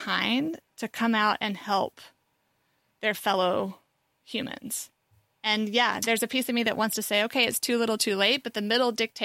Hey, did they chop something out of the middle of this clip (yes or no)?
no